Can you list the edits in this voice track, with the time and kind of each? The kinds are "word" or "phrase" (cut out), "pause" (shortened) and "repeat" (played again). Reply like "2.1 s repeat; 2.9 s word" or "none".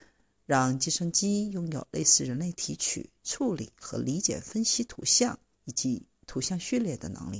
5.5 s pause